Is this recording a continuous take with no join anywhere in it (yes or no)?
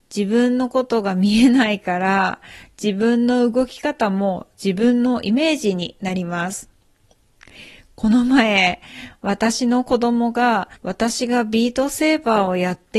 no